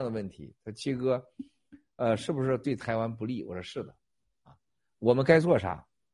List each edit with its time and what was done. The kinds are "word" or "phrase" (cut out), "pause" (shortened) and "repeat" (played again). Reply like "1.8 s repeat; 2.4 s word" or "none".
none